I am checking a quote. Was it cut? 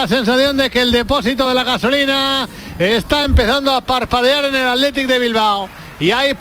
no; 0 cuts

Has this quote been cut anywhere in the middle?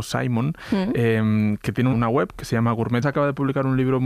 yes; 2 cuts; at 1.9 s, 3.0 s

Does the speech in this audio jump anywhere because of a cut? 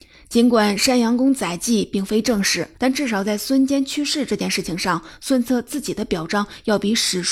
yes; 1 cut; at 2.7 s

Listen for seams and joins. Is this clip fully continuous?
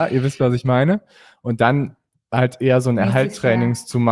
yes; 0 cuts

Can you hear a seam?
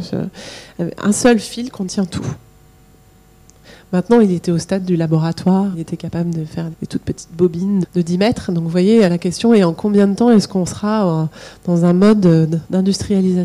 yes; 4 cuts; at 5.7 s, 6.7 s, 7.8 s, 9.1 s

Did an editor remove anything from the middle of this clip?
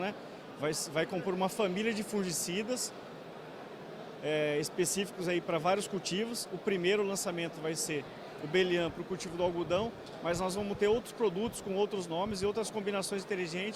no; 0 cuts

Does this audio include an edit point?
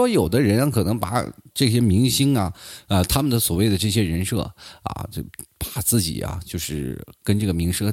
no; 0 cuts

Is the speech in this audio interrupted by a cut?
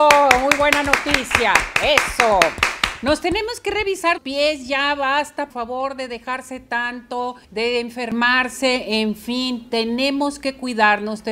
yes; 3 cuts; at 4.2 s, 5.5 s, 7.4 s

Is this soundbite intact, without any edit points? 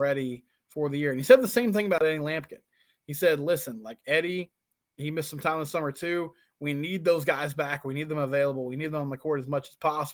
yes; 0 cuts

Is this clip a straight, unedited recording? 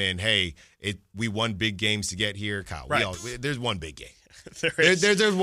yes; 0 cuts

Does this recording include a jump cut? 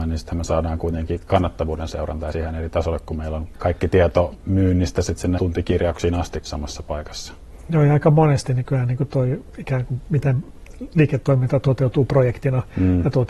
yes; 4 cuts; at 2.3 s, 3.5 s, 5.4 s, 6.5 s

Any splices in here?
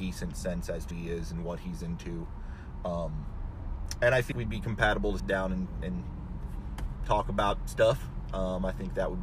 yes; 3 cuts; at 0.9 s, 4.3 s, 5.2 s

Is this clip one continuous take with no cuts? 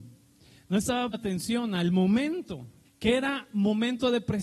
no; 2 cuts; at 1.1 s, 2.8 s

